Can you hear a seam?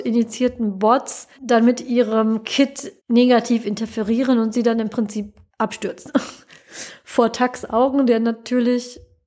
yes; 3 cuts; at 1.3 s, 3.0 s, 5.5 s

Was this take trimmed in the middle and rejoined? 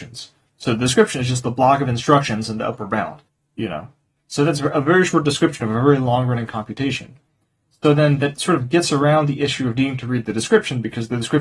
yes; 1 cut; at 3.3 s

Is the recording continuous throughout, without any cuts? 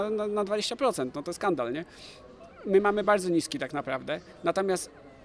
yes; 0 cuts

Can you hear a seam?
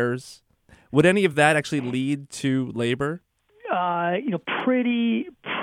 no; 0 cuts

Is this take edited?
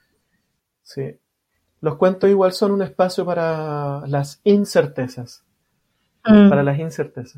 no; 0 cuts

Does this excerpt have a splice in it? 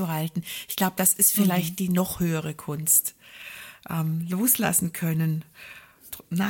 no; 0 cuts

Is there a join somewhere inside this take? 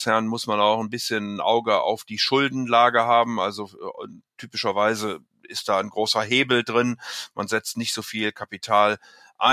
no; 0 cuts

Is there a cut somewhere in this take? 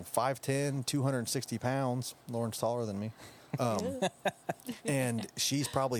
no; 0 cuts

